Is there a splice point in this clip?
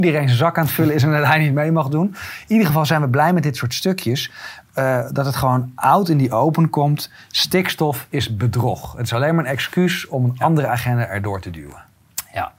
no; 0 cuts

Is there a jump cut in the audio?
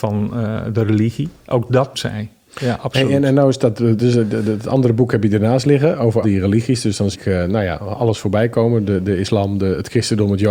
yes; 3 cuts; at 1.9 s, 6.2 s, 7.1 s

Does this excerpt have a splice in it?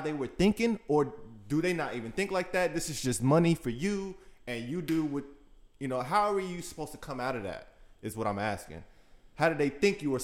no; 0 cuts

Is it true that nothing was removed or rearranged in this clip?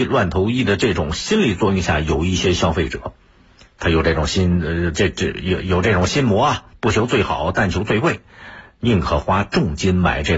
no; 1 cut; at 6.7 s

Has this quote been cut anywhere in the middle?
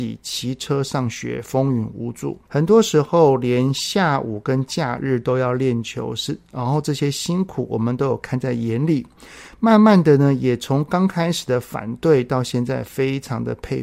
yes; 1 cut; at 2.5 s

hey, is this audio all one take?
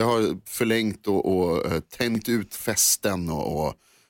yes; 0 cuts

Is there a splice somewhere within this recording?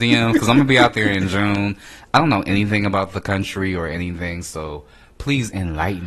no; 0 cuts

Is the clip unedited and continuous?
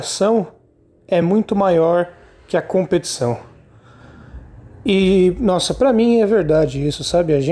yes; 0 cuts

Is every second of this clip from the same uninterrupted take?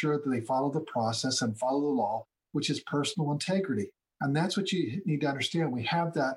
yes; 0 cuts

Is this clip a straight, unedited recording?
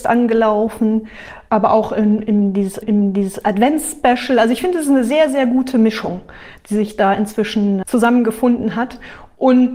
no; 2 cuts; at 2.8 s, 7.8 s

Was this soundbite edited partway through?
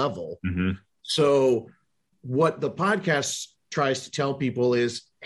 no; 0 cuts

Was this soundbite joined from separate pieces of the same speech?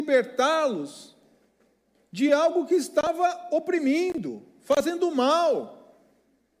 no; 0 cuts

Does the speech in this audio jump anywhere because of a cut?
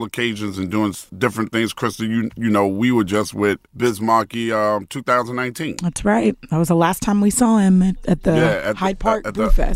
yes; 2 cuts; at 1.1 s, 3.7 s

